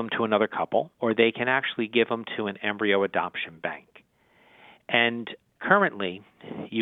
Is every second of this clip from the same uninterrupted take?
no; 1 cut; at 0.9 s

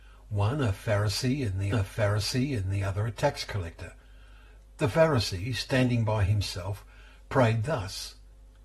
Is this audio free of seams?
no; 1 cut; at 1.7 s

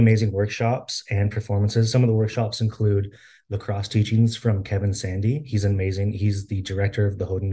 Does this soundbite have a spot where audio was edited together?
no; 0 cuts

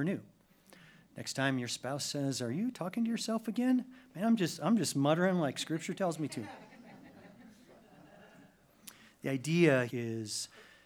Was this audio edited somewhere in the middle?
yes; 1 cut; at 9.9 s

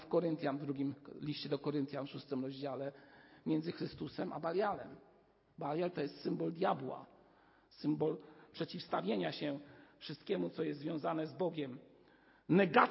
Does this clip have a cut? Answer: no; 0 cuts

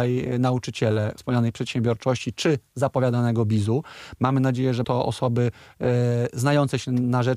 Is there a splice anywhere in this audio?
yes; 2 cuts; at 1.2 s, 4.8 s

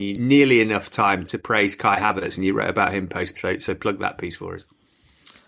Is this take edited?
yes; 2 cuts; at 1.3 s, 3.3 s

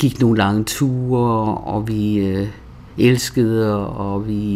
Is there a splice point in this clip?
no; 0 cuts

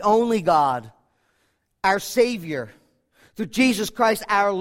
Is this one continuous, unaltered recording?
yes; 0 cuts

